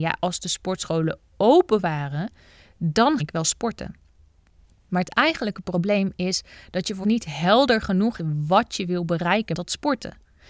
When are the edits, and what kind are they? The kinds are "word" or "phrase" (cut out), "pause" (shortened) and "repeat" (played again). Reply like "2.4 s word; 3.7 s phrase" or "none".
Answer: 3.2 s word; 7.0 s word; 8.2 s word; 9.5 s word